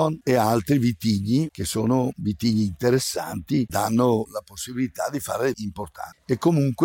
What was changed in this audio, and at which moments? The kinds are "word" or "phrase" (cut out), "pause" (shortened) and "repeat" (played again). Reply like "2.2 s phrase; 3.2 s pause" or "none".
3.7 s word; 5.5 s word

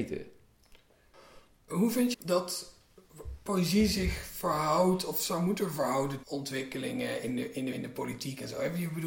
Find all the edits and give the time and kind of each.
2.1 s word; 6.2 s word; 7.7 s phrase

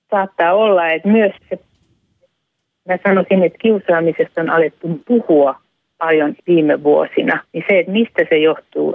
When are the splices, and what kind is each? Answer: 1.0 s word; 1.3 s word; 3.4 s word; 5.0 s word; 6.4 s word; 7.4 s word

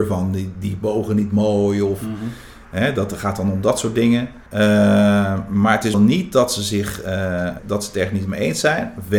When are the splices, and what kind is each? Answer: 4.5 s pause; 5.9 s word; 7.6 s word

